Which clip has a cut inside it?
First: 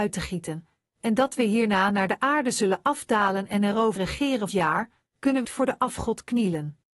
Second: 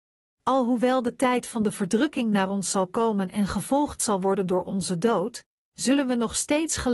first; 3 cuts; at 4.0 s, 4.5 s, 5.4 s

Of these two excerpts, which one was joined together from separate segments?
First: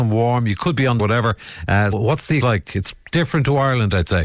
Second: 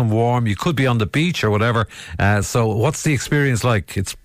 first; 3 cuts; at 1.0 s, 1.9 s, 2.4 s

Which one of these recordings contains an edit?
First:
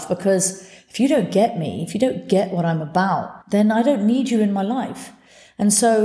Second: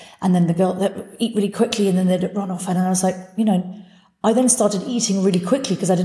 first; 1 cut; at 3.4 s

